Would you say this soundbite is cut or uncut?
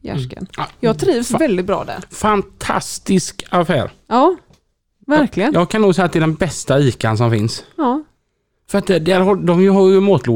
uncut